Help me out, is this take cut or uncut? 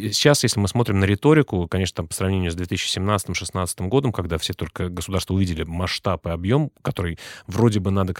uncut